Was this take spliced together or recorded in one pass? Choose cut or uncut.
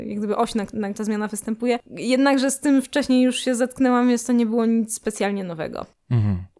cut